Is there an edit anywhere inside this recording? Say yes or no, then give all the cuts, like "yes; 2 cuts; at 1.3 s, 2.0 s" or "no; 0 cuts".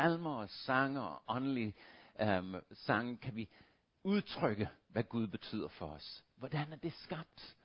no; 0 cuts